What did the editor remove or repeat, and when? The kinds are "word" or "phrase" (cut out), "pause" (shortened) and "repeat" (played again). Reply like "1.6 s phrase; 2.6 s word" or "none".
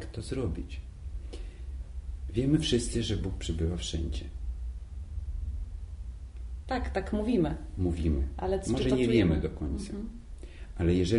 none